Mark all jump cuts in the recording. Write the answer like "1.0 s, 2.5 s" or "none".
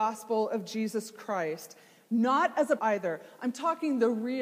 2.8 s